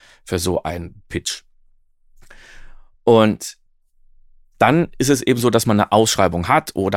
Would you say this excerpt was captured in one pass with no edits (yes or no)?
yes